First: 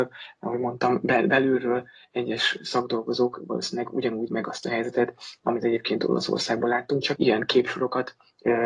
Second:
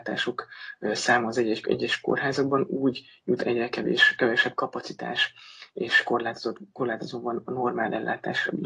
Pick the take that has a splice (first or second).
first